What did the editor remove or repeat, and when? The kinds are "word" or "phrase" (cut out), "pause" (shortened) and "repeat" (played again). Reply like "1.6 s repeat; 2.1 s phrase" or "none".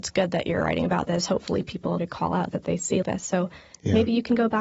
2.0 s word; 2.5 s word; 3.0 s word